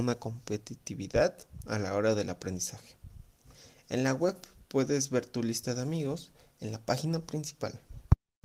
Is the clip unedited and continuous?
yes; 0 cuts

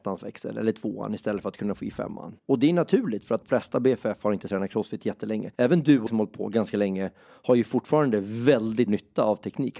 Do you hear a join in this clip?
yes; 5 cuts; at 2.4 s, 3.4 s, 5.5 s, 6.1 s, 8.9 s

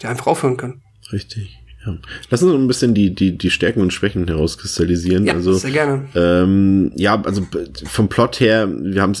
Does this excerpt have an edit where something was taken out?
no; 0 cuts

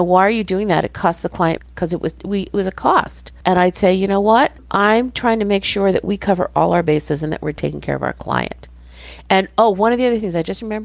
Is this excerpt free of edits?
no; 3 cuts; at 1.6 s, 3.4 s, 4.6 s

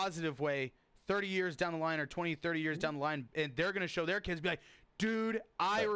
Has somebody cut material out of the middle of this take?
no; 0 cuts

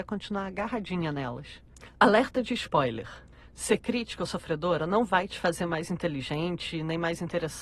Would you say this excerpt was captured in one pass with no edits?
yes; 0 cuts

